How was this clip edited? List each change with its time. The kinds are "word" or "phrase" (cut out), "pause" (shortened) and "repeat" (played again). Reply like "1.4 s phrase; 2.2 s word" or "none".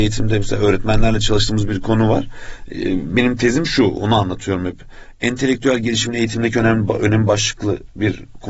none

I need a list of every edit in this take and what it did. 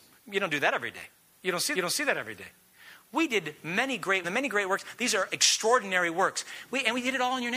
1.7 s repeat; 4.2 s phrase

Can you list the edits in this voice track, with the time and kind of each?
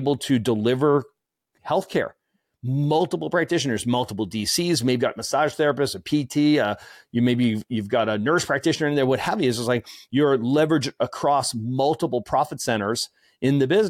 5.0 s word

